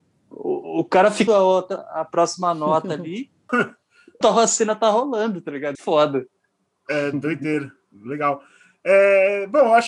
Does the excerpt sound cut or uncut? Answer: cut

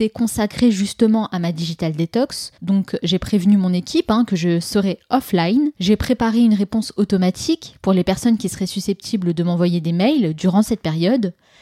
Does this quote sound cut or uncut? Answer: cut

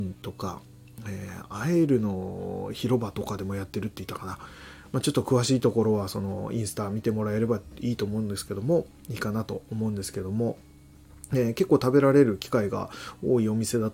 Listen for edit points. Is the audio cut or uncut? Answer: uncut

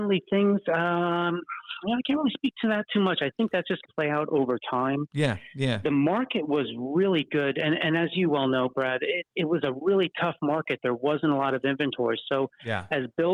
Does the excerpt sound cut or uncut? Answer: cut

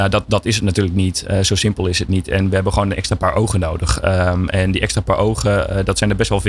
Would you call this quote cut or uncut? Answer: uncut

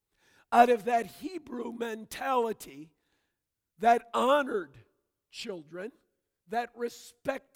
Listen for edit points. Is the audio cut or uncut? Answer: uncut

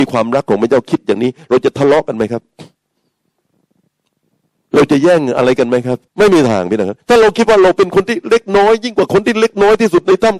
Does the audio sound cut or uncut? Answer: cut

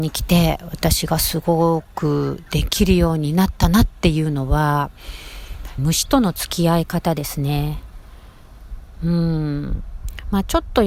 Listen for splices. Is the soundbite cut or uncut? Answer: cut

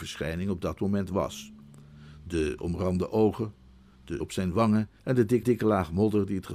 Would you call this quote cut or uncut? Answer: cut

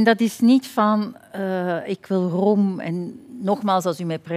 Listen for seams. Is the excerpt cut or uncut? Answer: uncut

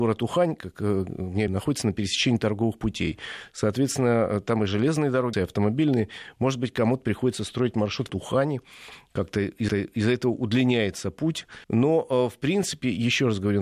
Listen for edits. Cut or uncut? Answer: cut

